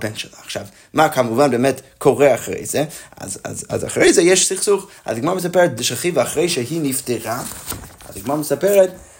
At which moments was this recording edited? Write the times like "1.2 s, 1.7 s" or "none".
5.8 s